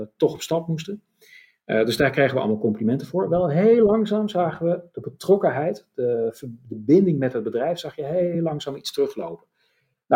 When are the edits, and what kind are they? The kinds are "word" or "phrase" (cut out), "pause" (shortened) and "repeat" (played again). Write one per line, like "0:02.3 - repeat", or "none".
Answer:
none